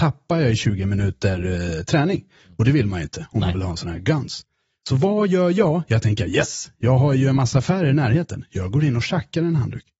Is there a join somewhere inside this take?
no; 0 cuts

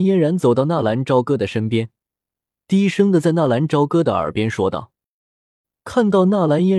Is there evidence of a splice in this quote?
no; 0 cuts

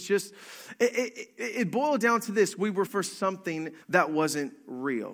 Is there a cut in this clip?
yes; 2 cuts; at 2.9 s, 3.8 s

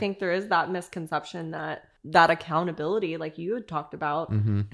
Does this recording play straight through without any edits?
no; 1 cut; at 2.0 s

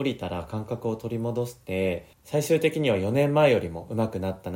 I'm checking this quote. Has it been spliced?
yes; 1 cut; at 2.1 s

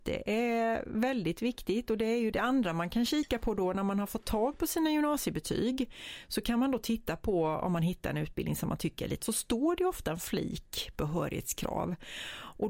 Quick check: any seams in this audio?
yes; 2 cuts; at 2.3 s, 9.2 s

